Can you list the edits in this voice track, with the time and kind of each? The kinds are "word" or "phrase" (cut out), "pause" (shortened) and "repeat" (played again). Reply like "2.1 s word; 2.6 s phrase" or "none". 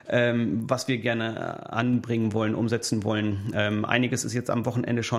none